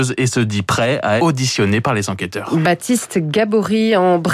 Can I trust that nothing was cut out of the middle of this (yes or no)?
no